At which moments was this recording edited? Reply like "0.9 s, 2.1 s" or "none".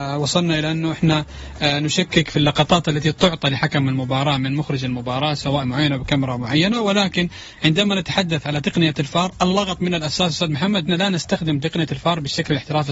5.6 s, 10.9 s